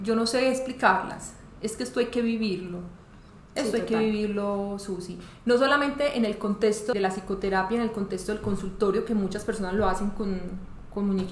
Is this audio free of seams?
no; 1 cut; at 6.9 s

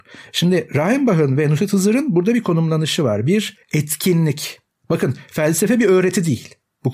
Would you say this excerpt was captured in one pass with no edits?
no; 1 cut; at 3.6 s

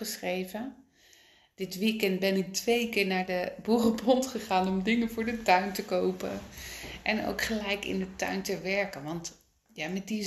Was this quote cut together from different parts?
no; 0 cuts

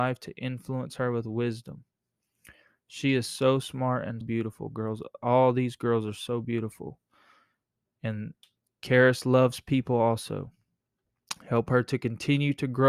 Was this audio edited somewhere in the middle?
yes; 1 cut; at 4.2 s

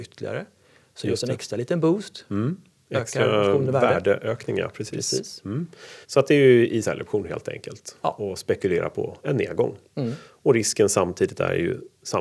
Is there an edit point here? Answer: yes; 2 cuts; at 6.0 s, 6.8 s

